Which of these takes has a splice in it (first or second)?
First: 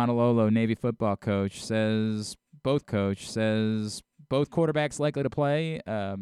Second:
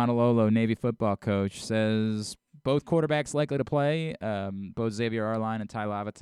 first